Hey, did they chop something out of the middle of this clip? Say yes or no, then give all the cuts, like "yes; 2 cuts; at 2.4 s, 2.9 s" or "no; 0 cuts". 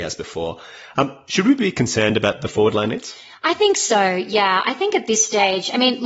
no; 0 cuts